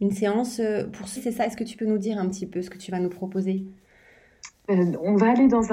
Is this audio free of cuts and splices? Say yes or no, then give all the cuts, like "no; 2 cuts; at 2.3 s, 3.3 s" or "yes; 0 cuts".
no; 1 cut; at 1.2 s